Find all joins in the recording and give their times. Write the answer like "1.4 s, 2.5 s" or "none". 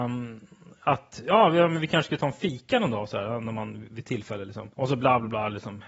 4.7 s